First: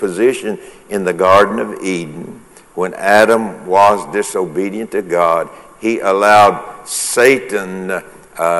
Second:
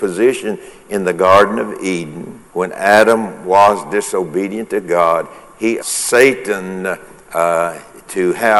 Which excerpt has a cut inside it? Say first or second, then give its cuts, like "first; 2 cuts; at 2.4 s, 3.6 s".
second; 2 cuts; at 2.5 s, 5.8 s